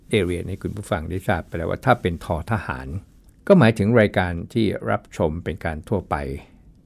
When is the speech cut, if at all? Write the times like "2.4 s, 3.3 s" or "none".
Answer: 3.3 s